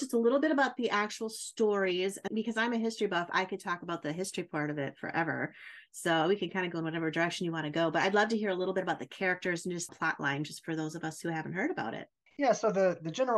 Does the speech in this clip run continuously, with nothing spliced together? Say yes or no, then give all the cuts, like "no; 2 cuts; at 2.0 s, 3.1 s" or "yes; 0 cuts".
no; 3 cuts; at 2.3 s, 9.9 s, 12.3 s